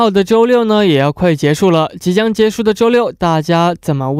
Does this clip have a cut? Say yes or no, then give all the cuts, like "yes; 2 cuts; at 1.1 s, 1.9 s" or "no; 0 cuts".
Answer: no; 0 cuts